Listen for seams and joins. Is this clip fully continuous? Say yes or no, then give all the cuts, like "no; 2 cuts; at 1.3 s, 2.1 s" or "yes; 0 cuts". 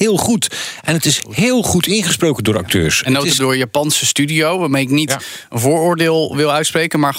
no; 1 cut; at 3.4 s